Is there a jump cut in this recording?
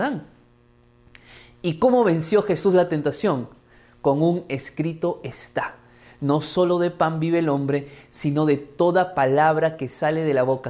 no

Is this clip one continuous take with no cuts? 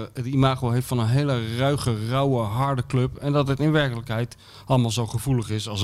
yes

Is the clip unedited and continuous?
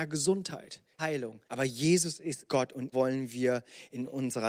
no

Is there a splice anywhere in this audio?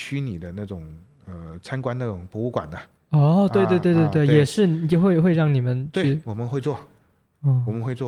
no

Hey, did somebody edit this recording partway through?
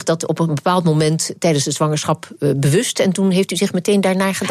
no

